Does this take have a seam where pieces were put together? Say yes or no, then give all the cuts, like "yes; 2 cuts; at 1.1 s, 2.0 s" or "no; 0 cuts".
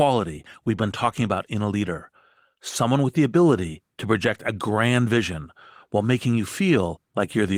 no; 0 cuts